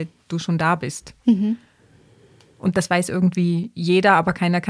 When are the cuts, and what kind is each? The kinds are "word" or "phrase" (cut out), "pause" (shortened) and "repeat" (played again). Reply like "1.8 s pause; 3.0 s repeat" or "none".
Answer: none